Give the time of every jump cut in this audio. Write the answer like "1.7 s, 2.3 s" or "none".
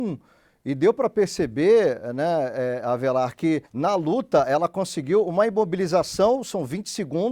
3.7 s